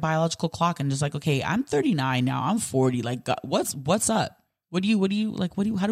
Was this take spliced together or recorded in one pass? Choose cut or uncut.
uncut